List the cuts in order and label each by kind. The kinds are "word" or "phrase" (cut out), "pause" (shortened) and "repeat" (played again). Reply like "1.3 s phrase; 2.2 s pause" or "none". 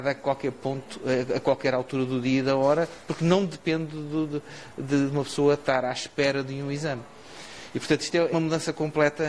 8.3 s word